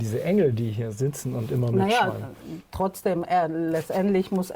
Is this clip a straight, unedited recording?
yes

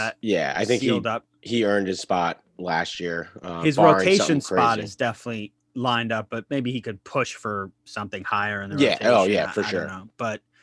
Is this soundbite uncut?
no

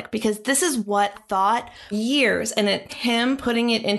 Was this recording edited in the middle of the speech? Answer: yes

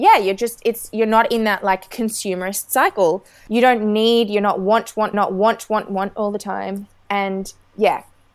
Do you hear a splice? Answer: yes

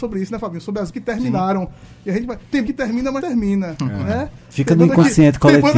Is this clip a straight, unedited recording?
no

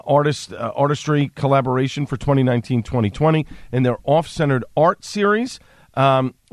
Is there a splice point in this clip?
no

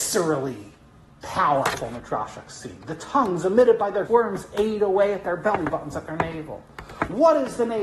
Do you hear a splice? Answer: yes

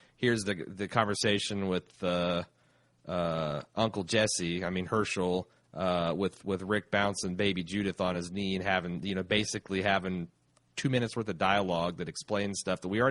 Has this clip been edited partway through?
no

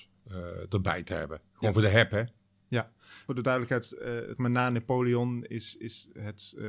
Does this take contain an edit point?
no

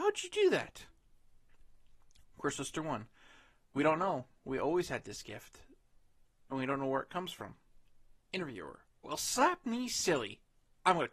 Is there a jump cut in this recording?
yes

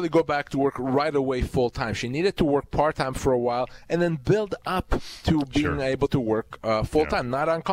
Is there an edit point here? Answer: no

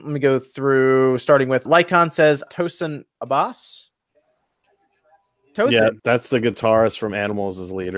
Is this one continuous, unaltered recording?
no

